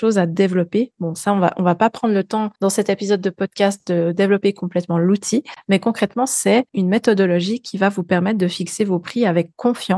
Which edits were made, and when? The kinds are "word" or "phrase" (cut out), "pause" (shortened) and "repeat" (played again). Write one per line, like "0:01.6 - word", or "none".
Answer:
0:02.5 - pause
0:06.7 - pause